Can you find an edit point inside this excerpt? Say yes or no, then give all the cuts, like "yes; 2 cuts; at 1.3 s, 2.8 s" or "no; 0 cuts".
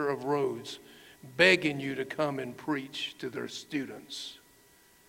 no; 0 cuts